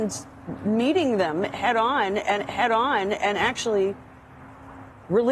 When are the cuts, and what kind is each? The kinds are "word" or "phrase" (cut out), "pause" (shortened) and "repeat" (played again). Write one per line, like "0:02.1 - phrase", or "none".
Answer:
0:02.4 - repeat